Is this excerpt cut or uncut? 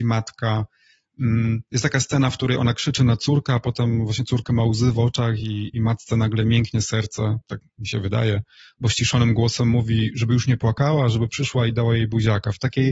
uncut